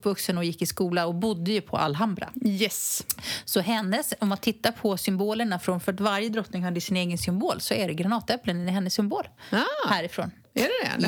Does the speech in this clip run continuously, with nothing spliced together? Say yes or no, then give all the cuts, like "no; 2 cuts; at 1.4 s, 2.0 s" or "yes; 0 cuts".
yes; 0 cuts